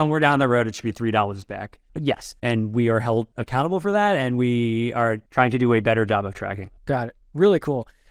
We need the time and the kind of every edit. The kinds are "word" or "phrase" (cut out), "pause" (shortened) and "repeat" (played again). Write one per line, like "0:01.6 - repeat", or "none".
0:02.4 - word
0:05.3 - pause
0:06.8 - pause